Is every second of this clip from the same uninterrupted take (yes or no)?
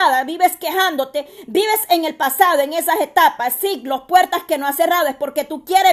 yes